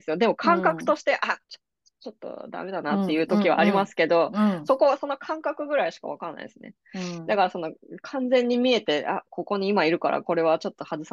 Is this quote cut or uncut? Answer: cut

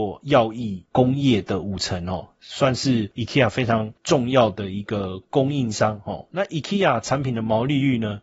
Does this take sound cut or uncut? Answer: uncut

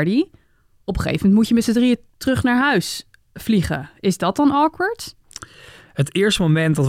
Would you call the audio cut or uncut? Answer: uncut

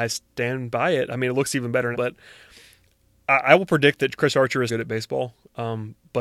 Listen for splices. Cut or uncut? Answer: cut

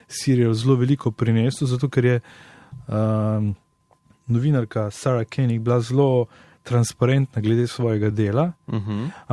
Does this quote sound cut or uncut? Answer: uncut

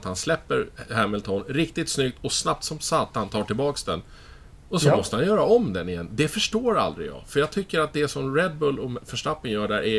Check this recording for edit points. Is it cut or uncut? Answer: uncut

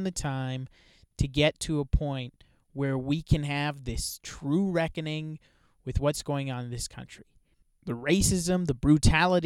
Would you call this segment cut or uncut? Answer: uncut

